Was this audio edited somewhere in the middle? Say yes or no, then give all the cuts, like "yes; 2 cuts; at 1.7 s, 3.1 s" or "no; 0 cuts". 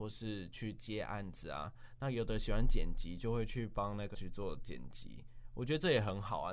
yes; 1 cut; at 4.1 s